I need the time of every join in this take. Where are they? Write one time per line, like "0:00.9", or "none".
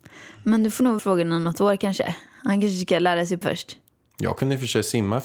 0:01.0
0:03.4